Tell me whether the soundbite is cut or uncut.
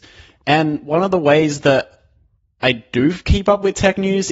uncut